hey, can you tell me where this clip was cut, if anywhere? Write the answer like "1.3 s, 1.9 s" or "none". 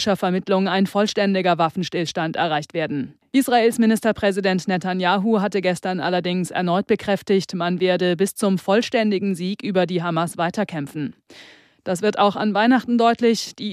3.2 s